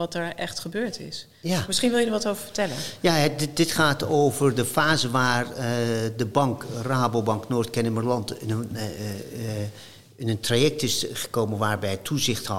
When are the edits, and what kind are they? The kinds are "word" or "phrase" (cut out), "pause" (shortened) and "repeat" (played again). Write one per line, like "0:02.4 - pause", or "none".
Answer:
none